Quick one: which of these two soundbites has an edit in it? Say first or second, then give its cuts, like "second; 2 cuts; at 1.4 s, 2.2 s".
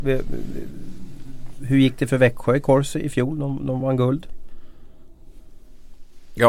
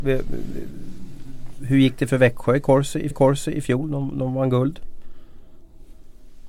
second; 1 cut; at 3.1 s